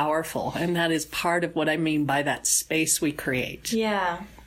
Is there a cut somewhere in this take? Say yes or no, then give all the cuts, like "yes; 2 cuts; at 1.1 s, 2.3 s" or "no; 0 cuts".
no; 0 cuts